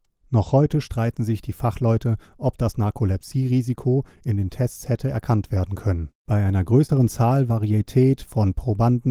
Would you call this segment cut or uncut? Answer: cut